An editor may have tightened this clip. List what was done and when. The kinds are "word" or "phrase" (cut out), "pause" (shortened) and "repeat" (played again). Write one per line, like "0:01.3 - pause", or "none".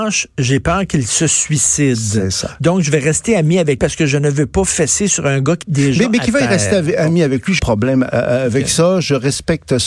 0:03.8 - word
0:05.6 - word
0:07.6 - word